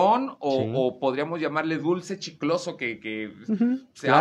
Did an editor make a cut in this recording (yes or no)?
no